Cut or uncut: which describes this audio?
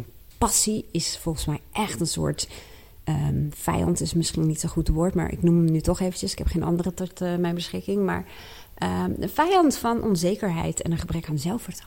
uncut